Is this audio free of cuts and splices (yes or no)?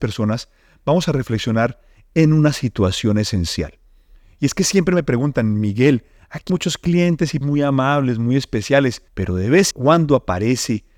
no